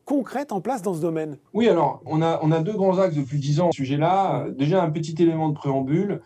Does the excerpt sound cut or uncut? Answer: cut